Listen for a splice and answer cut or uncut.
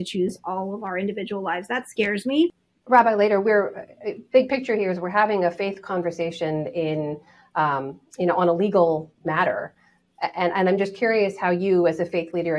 uncut